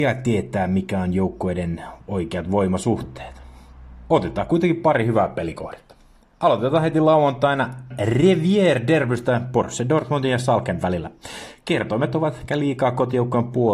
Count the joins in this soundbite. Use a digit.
1